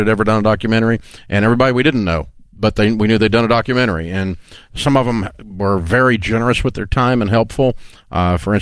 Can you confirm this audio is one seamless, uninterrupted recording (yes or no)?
yes